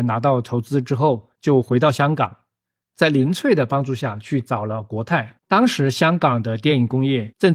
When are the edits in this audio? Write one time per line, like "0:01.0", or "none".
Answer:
0:05.4